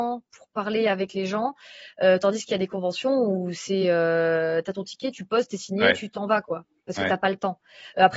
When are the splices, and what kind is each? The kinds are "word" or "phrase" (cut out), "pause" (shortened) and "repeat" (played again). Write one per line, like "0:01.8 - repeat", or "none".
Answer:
none